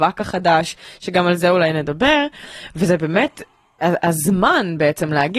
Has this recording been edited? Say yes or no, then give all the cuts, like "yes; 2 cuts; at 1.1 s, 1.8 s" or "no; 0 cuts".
no; 0 cuts